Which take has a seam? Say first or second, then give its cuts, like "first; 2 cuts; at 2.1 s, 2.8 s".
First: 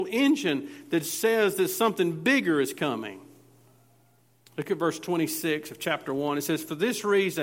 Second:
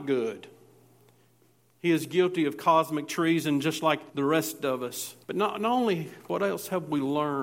second; 2 cuts; at 4.1 s, 5.2 s